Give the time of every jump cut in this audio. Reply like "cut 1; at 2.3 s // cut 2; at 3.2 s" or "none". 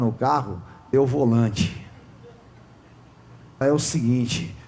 cut 1; at 0.9 s // cut 2; at 3.6 s